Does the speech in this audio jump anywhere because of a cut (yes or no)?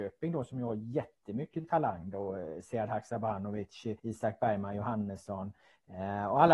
yes